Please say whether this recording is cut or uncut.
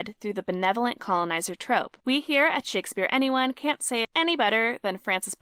cut